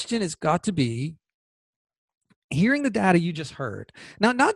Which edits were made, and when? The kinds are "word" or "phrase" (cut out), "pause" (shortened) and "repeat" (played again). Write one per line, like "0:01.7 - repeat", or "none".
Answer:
none